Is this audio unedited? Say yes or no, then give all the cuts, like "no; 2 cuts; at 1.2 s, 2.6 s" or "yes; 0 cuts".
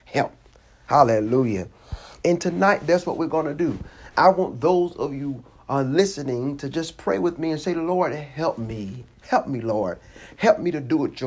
yes; 0 cuts